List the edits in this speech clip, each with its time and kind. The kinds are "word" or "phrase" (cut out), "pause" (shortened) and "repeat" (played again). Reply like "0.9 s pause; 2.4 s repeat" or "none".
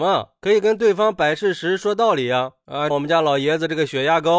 2.9 s phrase